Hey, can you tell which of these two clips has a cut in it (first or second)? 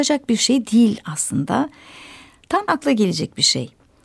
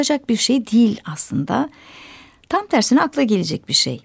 first